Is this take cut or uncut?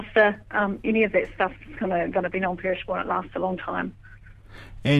uncut